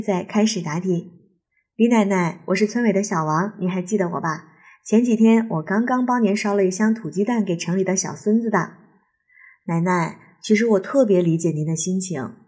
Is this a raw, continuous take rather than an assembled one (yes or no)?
yes